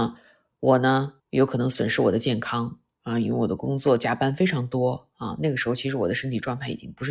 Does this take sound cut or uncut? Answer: cut